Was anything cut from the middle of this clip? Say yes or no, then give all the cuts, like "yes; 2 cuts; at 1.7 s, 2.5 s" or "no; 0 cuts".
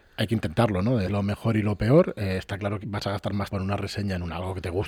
yes; 3 cuts; at 1.1 s, 2.8 s, 3.5 s